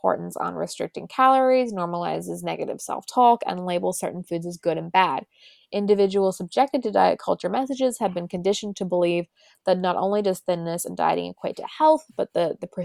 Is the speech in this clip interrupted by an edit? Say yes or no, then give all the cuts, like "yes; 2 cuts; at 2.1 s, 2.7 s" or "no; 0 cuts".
no; 0 cuts